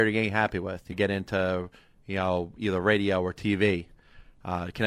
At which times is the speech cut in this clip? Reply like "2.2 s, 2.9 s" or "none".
0.9 s

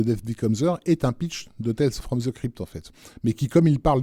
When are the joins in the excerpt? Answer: none

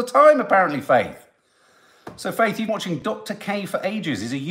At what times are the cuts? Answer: 2.7 s

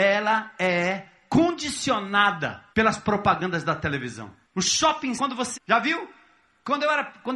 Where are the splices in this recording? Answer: 2.7 s, 4.4 s, 5.2 s, 5.5 s

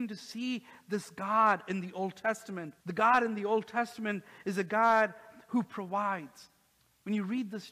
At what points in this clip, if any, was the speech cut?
2.8 s

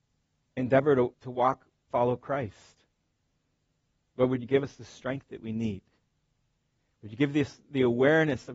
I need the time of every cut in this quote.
1.1 s, 1.9 s

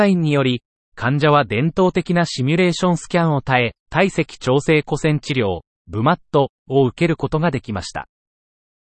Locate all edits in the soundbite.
3.8 s

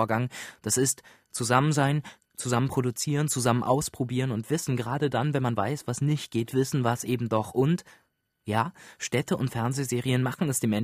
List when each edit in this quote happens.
none

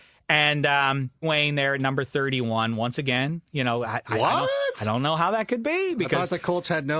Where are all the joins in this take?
1.2 s

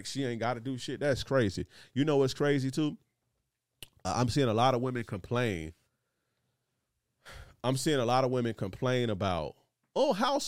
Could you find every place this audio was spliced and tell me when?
none

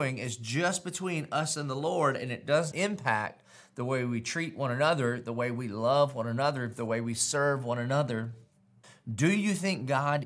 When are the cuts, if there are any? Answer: 2.7 s, 8.8 s

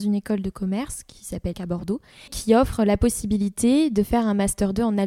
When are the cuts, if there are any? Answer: 1.5 s, 2.3 s

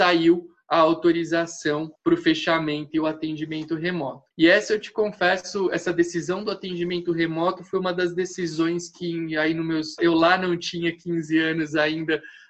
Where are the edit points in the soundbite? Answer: 1.9 s, 4.3 s, 10.0 s

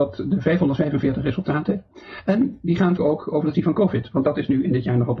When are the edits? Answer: 3.0 s, 3.5 s

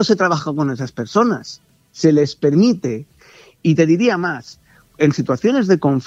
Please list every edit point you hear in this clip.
none

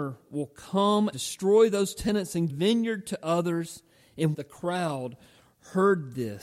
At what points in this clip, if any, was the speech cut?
1.1 s, 2.5 s, 4.3 s

